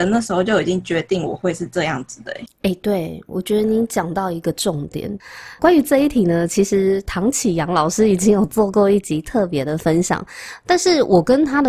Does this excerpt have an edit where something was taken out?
yes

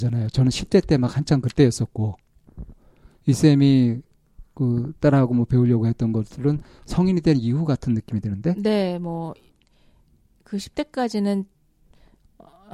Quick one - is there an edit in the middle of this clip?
no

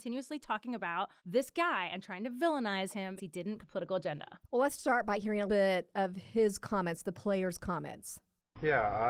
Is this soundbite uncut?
no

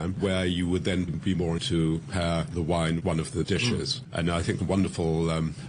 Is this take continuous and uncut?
no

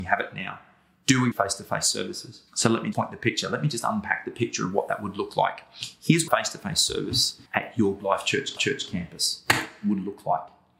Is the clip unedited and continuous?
no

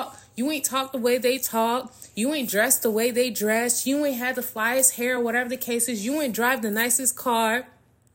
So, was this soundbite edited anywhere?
no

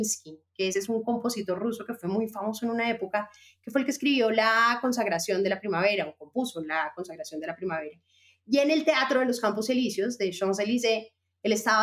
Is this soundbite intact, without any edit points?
yes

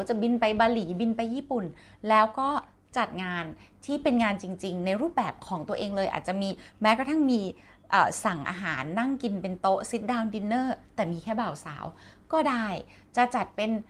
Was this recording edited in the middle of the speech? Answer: no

